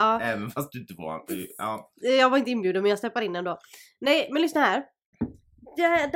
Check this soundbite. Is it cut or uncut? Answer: uncut